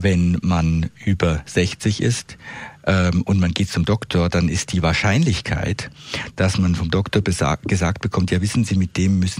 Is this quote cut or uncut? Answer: uncut